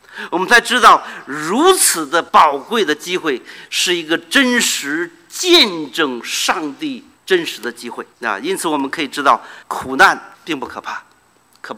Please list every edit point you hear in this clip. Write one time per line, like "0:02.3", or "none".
0:02.3
0:07.2
0:08.1
0:09.6
0:10.3